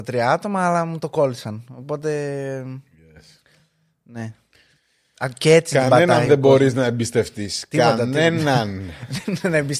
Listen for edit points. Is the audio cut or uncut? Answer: uncut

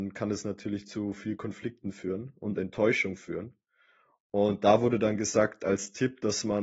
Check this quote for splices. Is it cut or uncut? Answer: uncut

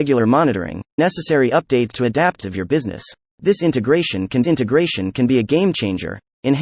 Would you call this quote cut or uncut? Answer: cut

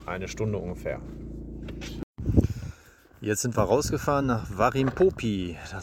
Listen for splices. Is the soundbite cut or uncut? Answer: uncut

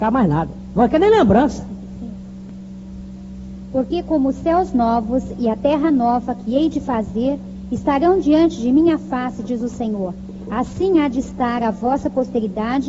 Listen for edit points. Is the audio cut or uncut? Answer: uncut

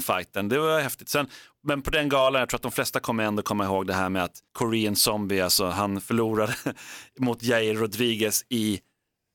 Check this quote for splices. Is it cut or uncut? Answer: cut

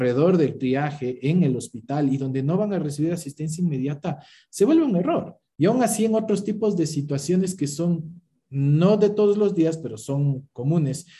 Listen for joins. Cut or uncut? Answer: uncut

